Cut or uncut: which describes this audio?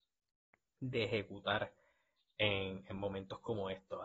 uncut